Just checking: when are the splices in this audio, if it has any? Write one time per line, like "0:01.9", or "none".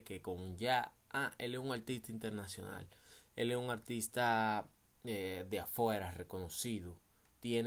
0:01.0
0:04.9